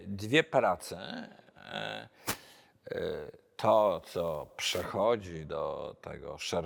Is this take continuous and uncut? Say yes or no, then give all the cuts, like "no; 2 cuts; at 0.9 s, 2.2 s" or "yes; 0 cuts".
yes; 0 cuts